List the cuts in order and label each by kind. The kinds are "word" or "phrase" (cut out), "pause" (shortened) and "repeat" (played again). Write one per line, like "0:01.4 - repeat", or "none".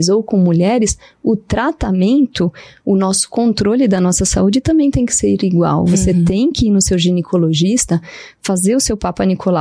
none